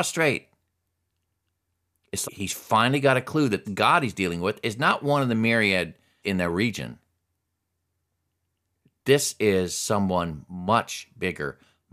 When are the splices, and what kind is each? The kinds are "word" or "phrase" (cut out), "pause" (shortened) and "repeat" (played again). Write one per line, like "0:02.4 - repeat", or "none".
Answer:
0:02.2 - word
0:03.6 - word
0:06.2 - word